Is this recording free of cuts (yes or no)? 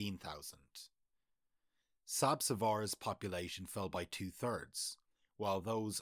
yes